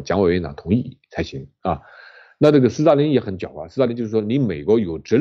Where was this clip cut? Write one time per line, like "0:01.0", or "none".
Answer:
none